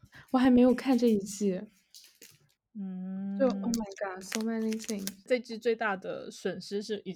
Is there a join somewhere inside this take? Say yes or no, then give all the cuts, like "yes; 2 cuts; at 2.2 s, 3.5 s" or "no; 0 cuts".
no; 0 cuts